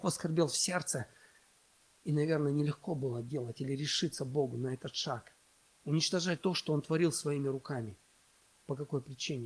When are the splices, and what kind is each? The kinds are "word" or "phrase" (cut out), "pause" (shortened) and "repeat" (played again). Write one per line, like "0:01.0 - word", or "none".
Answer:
0:06.4 - word

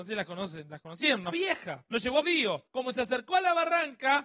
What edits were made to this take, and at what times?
0:01.3 - word
0:01.9 - pause
0:02.2 - phrase
0:02.7 - pause

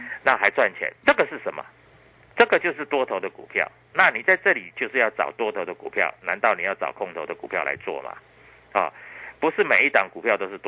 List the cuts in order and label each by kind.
0:01.0 - word

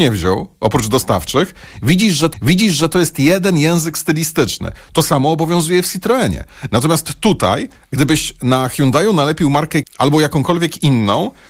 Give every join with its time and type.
0:02.3 - repeat
0:09.8 - word

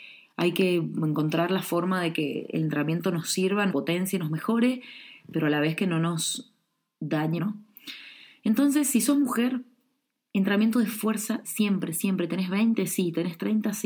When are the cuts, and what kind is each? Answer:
0:03.7 - word
0:07.4 - word
0:11.4 - word

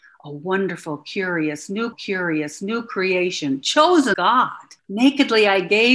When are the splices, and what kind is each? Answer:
0:01.9 - repeat
0:04.1 - word
0:04.8 - pause

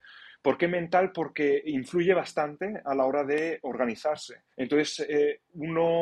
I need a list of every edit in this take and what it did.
0:04.5 - pause

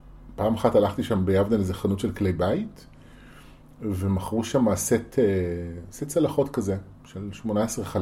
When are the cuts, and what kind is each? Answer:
none

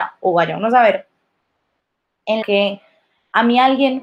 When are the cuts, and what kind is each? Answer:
0:02.4 - word

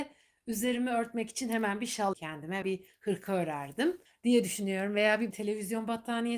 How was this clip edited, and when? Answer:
0:02.1 - word
0:02.6 - word
0:04.1 - pause
0:05.3 - word

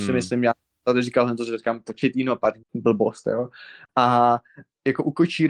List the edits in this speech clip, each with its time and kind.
0:02.6 - pause

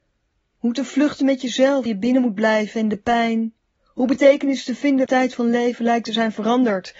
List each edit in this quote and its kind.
0:01.9 - word
0:03.7 - pause
0:05.1 - phrase

